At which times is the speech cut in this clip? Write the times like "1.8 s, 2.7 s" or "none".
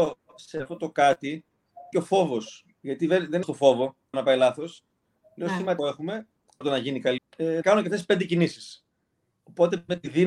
1.9 s, 3.4 s, 4.1 s, 5.8 s, 6.6 s, 7.2 s, 7.6 s